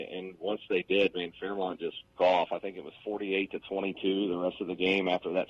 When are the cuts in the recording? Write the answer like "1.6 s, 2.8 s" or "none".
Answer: 2.2 s